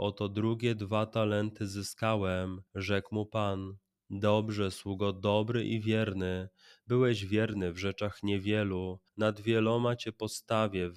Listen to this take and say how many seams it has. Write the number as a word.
two